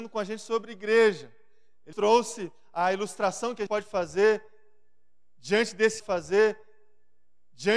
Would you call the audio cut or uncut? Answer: cut